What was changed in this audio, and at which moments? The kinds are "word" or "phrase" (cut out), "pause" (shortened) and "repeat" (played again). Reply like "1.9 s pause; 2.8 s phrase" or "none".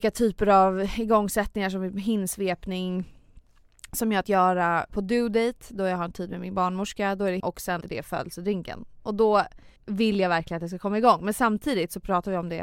4.2 s word; 4.9 s word; 7.4 s word; 7.8 s word; 9.8 s pause